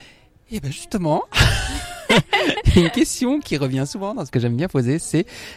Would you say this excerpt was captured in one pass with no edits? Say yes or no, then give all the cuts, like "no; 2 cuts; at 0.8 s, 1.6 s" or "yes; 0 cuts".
no; 1 cut; at 4.3 s